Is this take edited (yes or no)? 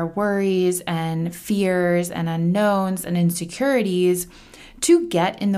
no